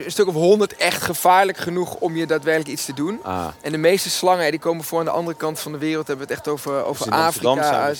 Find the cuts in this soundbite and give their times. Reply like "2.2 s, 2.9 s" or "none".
none